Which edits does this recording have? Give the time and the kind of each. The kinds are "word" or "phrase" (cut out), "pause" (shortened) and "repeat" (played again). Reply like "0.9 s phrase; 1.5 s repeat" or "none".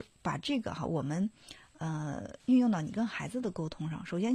2.4 s pause